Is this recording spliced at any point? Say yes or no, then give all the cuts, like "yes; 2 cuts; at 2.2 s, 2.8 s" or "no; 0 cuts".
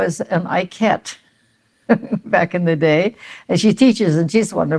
no; 0 cuts